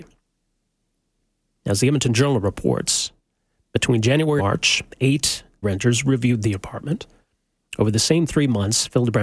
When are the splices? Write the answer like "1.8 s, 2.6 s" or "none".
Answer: 4.4 s, 5.6 s